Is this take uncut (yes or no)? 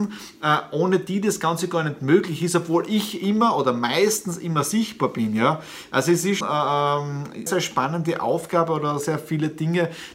no